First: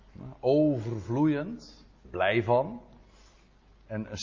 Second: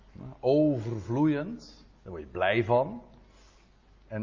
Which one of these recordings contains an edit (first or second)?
first